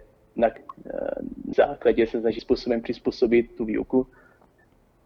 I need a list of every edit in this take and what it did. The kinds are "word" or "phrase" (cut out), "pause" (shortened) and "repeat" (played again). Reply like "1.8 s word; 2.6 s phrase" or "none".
1.5 s word; 2.4 s word